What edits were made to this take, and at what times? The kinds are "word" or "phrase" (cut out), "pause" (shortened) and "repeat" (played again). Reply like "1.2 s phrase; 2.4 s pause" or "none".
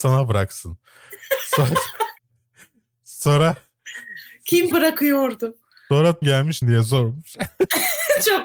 2.2 s pause; 4.7 s word; 6.2 s word; 6.6 s word